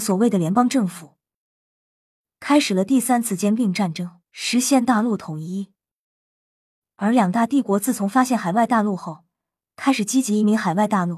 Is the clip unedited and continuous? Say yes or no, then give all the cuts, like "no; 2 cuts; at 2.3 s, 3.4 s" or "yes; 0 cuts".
no; 1 cut; at 4.3 s